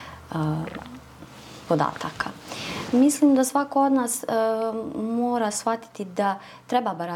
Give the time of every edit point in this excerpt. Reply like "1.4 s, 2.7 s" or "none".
none